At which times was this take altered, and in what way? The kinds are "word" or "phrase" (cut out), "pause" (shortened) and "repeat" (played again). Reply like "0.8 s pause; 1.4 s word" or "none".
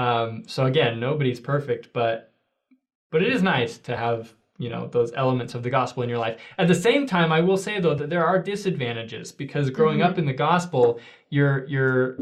none

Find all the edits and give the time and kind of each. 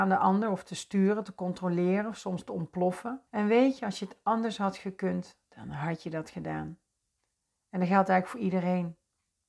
3.3 s pause

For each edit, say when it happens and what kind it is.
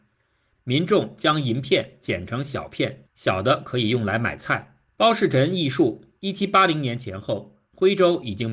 3.1 s pause; 4.9 s pause

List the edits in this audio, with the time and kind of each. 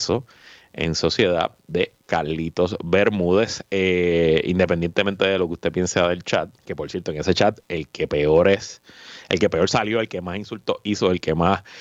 6.5 s pause

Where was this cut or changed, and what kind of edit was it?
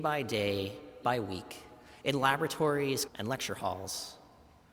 1.0 s word; 3.1 s word

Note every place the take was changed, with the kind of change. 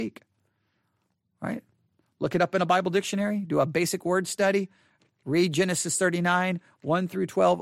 none

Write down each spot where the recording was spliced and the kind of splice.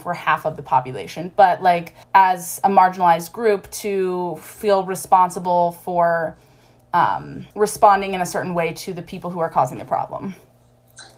2.0 s pause; 7.5 s pause

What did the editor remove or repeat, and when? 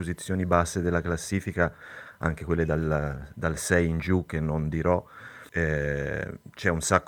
5.5 s pause

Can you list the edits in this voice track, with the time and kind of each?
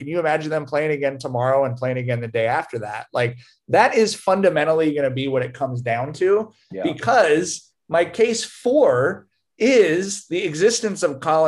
none

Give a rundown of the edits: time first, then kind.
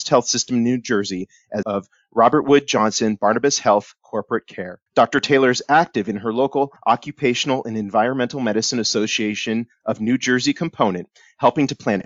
1.6 s word; 4.9 s pause; 6.8 s pause

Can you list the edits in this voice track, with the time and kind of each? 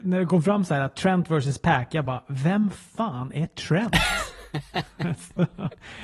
none

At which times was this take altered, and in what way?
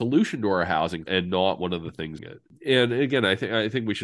1.1 s word; 2.2 s word

